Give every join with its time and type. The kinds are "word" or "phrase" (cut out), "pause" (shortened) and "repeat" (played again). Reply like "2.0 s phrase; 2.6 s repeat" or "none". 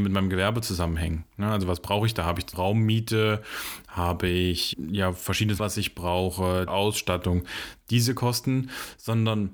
2.5 s word; 4.7 s word; 5.6 s word; 6.7 s word